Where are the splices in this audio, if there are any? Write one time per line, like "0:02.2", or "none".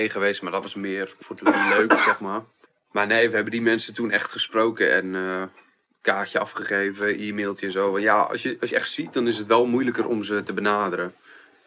0:01.2
0:02.6
0:08.7